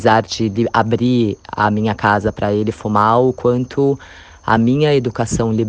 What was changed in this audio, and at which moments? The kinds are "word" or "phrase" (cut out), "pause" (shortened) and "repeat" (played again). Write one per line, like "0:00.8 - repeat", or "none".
none